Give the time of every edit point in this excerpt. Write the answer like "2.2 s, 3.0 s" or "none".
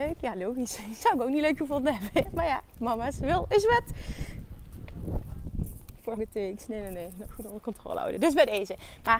6.2 s, 7.2 s